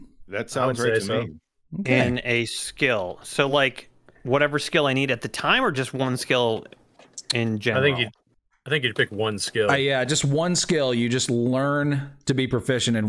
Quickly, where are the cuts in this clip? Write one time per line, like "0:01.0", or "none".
none